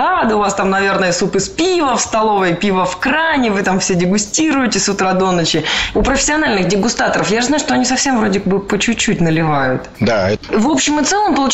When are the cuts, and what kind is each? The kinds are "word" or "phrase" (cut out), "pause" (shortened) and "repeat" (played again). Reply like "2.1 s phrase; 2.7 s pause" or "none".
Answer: none